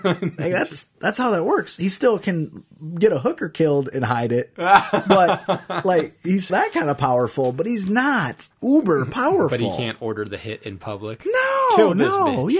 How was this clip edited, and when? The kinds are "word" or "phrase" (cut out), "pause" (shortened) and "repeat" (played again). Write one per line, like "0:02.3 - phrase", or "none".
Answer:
0:06.5 - word
0:08.5 - pause